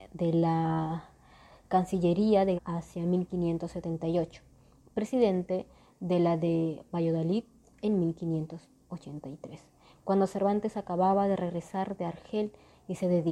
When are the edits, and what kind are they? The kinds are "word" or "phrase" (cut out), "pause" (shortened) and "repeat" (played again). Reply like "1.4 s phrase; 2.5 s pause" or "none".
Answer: 2.6 s word